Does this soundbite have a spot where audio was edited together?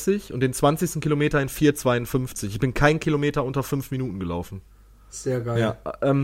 no; 0 cuts

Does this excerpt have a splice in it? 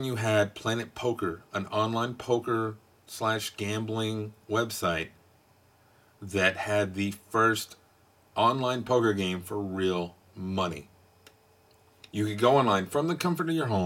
no; 0 cuts

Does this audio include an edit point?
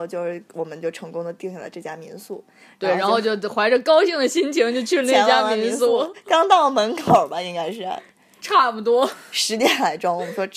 no; 0 cuts

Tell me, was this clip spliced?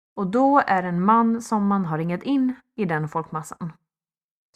no; 0 cuts

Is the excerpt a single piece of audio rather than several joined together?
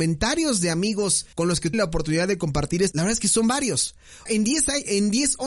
no; 4 cuts; at 1.3 s, 1.7 s, 2.9 s, 4.3 s

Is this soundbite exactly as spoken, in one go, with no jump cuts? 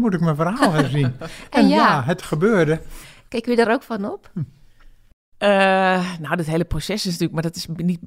yes; 0 cuts

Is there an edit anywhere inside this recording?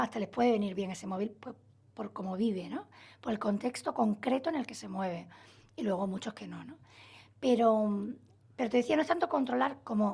no; 0 cuts

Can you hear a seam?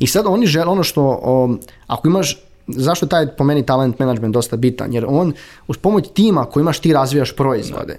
no; 0 cuts

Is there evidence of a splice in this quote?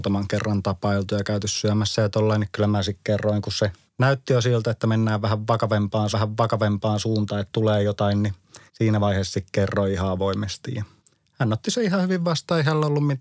yes; 5 cuts; at 3.9 s, 6.1 s, 7.5 s, 8.7 s, 11.0 s

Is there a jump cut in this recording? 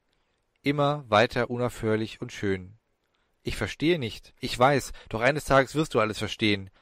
no; 0 cuts

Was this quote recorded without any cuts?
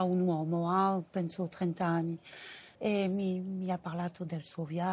no; 1 cut; at 2.7 s

